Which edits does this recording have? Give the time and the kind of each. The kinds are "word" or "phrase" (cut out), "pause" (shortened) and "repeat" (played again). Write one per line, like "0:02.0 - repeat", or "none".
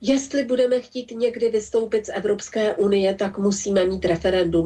none